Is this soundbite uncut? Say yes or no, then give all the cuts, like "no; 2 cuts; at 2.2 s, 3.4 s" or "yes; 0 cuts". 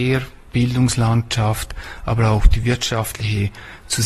yes; 0 cuts